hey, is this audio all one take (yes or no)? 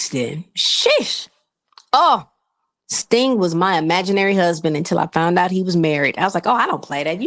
yes